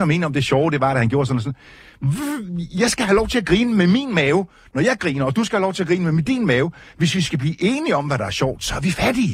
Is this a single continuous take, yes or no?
yes